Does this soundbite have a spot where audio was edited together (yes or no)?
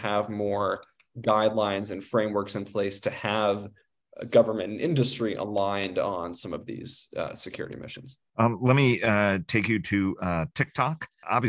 no